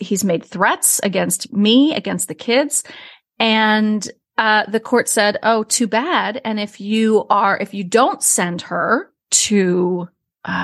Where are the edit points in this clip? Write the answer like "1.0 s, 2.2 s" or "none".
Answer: none